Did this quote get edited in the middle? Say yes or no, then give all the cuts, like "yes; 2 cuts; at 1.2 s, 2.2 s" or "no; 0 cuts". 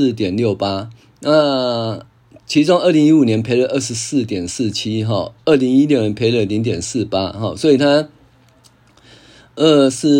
no; 0 cuts